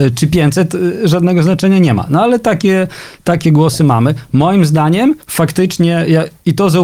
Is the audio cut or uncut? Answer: cut